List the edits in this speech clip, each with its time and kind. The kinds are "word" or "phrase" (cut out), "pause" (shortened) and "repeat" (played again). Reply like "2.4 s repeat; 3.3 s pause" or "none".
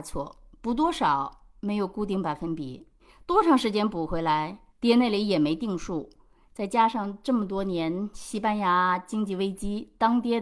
3.0 s pause; 4.7 s pause